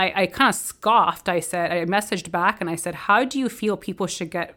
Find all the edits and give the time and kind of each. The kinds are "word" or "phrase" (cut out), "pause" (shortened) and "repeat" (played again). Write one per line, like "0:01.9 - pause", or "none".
none